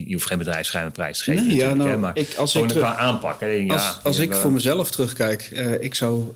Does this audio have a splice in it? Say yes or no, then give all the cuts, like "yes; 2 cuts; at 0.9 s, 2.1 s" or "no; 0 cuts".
no; 0 cuts